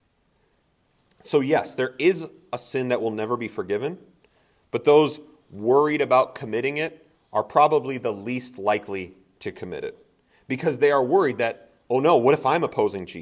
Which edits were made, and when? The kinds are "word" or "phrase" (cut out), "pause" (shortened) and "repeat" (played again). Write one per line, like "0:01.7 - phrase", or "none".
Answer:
none